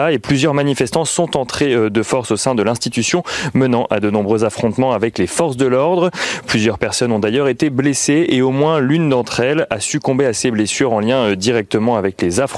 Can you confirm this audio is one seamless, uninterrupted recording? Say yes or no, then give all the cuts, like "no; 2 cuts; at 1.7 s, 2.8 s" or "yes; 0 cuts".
yes; 0 cuts